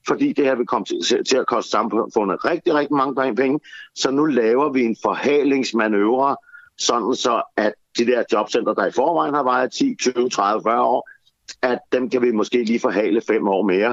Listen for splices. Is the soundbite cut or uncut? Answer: uncut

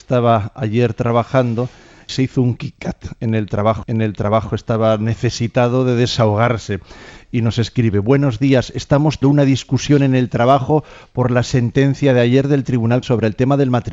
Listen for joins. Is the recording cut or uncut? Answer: cut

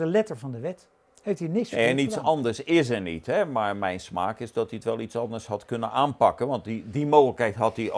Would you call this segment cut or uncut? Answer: cut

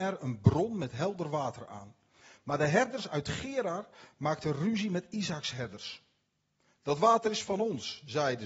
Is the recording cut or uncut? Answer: uncut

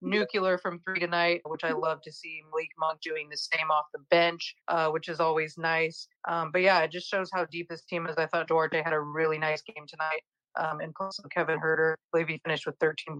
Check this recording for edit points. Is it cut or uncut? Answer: cut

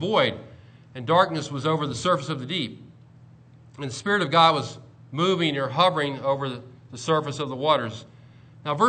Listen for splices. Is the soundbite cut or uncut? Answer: uncut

